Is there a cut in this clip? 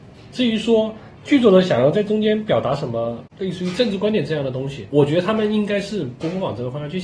yes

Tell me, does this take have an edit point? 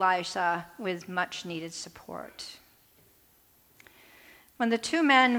no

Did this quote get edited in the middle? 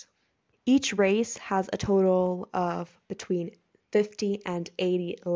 no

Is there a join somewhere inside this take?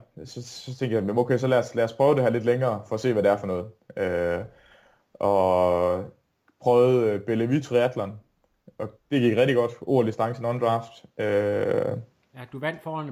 no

